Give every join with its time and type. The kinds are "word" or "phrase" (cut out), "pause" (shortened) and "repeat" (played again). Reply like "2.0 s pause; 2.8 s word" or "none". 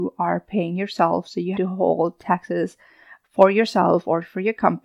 1.5 s word